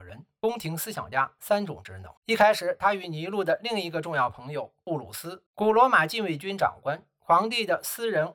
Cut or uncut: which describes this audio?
cut